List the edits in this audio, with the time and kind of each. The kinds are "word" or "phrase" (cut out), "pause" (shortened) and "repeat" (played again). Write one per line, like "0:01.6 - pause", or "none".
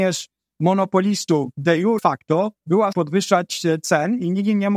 0:02.0 - phrase
0:02.6 - pause
0:02.9 - word